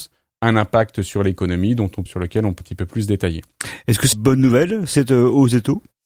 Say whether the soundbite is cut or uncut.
cut